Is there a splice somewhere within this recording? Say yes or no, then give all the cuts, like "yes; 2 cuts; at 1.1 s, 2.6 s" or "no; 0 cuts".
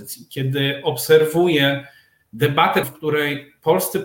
yes; 1 cut; at 2.8 s